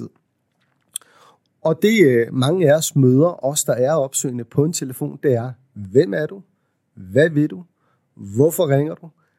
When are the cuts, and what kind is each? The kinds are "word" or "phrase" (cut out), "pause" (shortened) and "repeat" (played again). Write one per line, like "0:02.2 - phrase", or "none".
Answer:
none